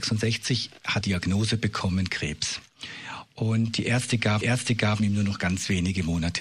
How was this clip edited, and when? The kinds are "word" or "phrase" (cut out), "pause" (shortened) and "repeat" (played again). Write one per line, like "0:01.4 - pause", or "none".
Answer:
0:01.0 - phrase
0:04.4 - repeat